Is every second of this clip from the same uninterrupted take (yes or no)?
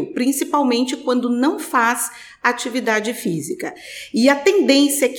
yes